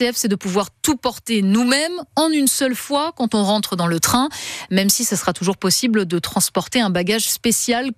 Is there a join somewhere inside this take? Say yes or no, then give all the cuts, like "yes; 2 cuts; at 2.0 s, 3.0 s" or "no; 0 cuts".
no; 0 cuts